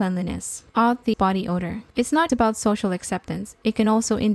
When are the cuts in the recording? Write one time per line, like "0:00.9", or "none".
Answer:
0:01.1
0:02.3